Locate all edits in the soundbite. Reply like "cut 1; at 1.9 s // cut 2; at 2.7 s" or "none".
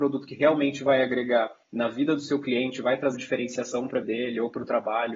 cut 1; at 1.6 s // cut 2; at 3.1 s // cut 3; at 4.0 s

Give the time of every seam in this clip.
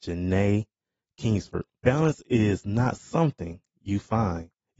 cut 1; at 1.8 s

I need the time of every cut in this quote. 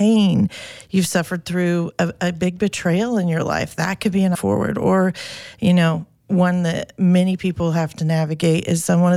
cut 1; at 4.3 s

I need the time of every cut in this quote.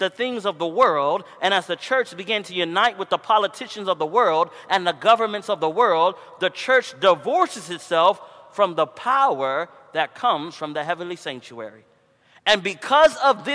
none

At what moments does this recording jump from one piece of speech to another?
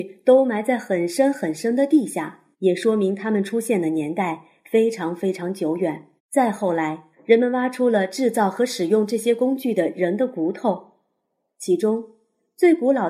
cut 1; at 2.5 s // cut 2; at 6.2 s // cut 3; at 7.1 s

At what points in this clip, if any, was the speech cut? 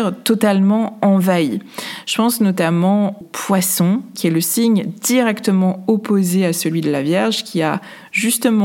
cut 1; at 3.2 s // cut 2; at 4.1 s

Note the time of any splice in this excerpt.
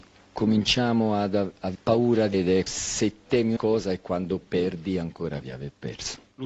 cut 1; at 1.7 s // cut 2; at 2.3 s // cut 3; at 2.7 s // cut 4; at 3.6 s // cut 5; at 4.4 s // cut 6; at 5.4 s

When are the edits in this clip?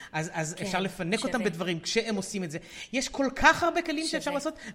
none

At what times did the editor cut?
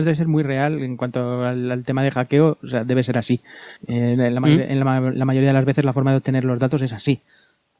cut 1; at 3.8 s

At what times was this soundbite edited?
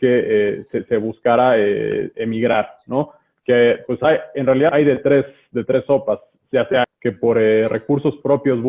cut 1; at 4.7 s // cut 2; at 6.8 s

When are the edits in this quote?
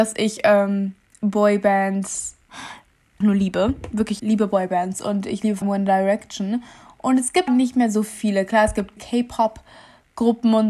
cut 1; at 2.5 s // cut 2; at 3.2 s // cut 3; at 4.2 s // cut 4; at 5.6 s // cut 5; at 7.5 s // cut 6; at 9.0 s

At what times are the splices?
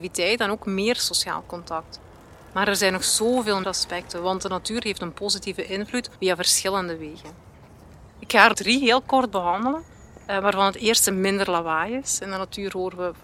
cut 1; at 3.6 s // cut 2; at 6.2 s // cut 3; at 8.1 s // cut 4; at 8.5 s

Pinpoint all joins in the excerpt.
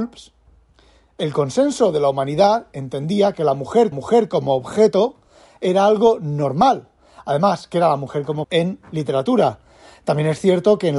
cut 1; at 3.9 s // cut 2; at 8.4 s

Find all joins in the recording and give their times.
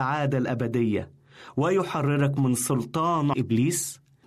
cut 1; at 3.3 s

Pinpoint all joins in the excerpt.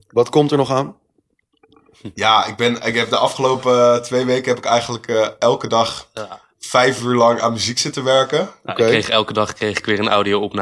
cut 1; at 6.5 s

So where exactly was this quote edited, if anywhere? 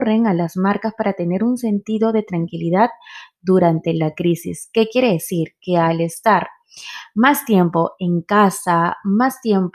none

